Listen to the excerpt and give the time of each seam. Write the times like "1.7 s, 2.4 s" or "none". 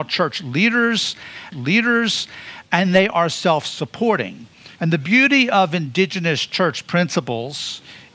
1.5 s, 4.7 s